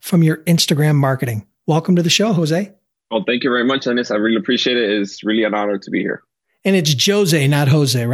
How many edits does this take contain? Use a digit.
0